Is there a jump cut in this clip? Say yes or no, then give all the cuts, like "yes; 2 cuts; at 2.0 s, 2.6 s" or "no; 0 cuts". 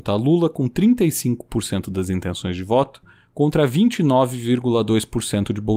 no; 0 cuts